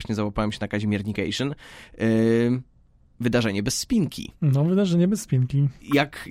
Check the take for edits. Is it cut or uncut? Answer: uncut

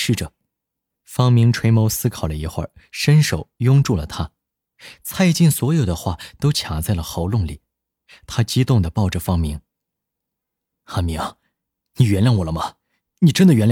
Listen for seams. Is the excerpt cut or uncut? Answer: uncut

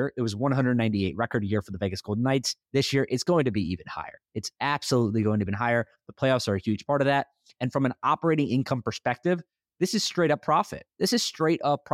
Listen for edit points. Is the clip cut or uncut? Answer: cut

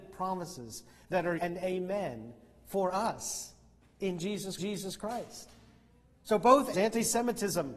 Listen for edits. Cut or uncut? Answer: cut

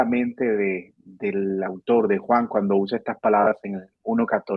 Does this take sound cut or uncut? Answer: uncut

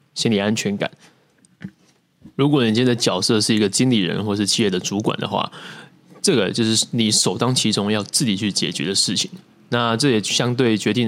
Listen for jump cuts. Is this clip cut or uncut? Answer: uncut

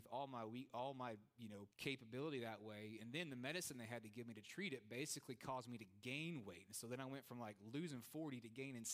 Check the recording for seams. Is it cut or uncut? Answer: cut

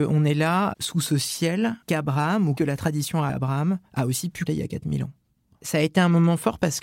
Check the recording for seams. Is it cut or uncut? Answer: cut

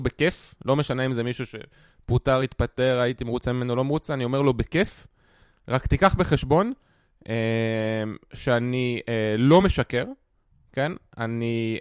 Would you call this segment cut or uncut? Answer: uncut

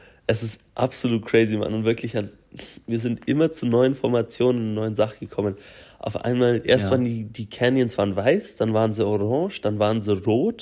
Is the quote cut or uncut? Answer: uncut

